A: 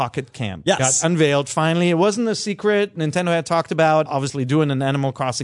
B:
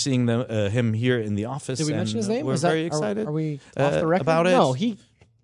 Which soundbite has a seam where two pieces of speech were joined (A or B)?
A